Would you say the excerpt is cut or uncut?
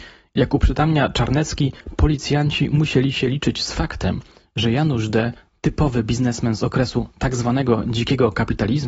uncut